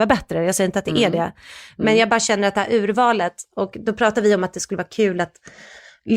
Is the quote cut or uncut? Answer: uncut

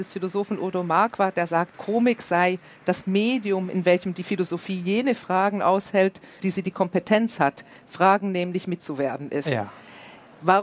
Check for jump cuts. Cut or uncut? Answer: cut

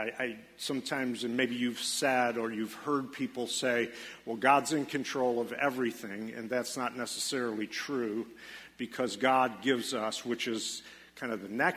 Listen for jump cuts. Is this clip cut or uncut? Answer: uncut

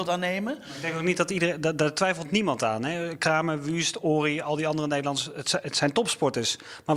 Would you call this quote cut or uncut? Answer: uncut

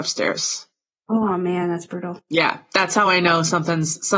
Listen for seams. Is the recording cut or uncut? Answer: uncut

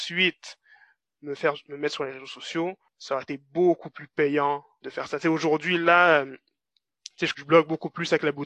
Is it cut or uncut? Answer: cut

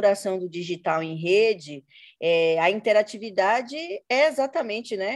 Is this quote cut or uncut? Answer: uncut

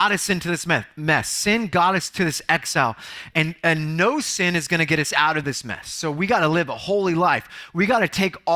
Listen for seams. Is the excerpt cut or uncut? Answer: uncut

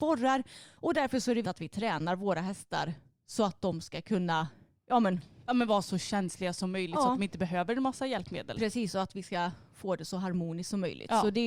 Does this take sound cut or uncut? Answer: cut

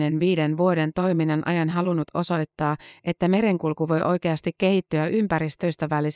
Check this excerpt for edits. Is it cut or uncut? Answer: uncut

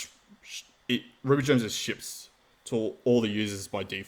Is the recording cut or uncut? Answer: uncut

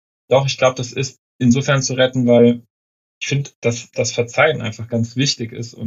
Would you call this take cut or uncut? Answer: uncut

